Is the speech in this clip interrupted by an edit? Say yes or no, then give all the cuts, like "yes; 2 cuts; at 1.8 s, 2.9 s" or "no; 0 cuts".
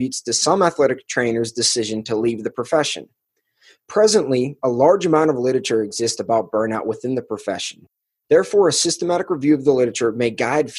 no; 0 cuts